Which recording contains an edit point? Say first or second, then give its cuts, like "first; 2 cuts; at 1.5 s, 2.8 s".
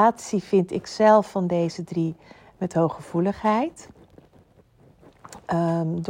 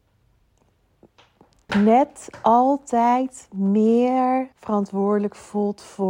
second; 2 cuts; at 1.7 s, 4.5 s